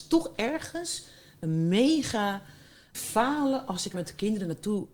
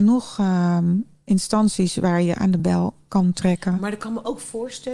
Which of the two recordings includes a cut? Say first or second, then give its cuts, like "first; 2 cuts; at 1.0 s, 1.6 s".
first; 2 cuts; at 2.9 s, 3.9 s